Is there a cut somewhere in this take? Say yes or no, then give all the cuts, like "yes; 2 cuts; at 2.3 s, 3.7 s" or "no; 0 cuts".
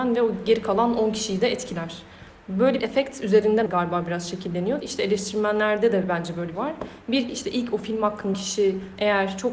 yes; 6 cuts; at 2.8 s, 3.7 s, 4.8 s, 6.5 s, 7.3 s, 8.3 s